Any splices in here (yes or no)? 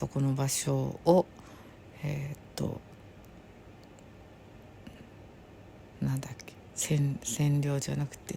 no